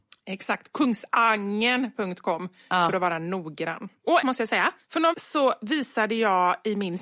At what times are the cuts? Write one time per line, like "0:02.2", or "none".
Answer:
0:04.2
0:05.1